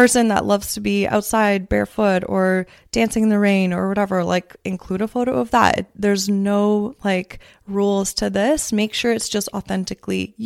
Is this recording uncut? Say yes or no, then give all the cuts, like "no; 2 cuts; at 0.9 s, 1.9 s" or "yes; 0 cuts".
yes; 0 cuts